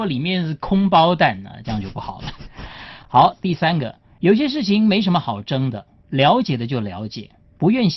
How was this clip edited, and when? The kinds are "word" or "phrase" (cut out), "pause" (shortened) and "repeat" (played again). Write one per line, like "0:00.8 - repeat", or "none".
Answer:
none